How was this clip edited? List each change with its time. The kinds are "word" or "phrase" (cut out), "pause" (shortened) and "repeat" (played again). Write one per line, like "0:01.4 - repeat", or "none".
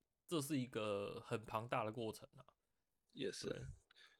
none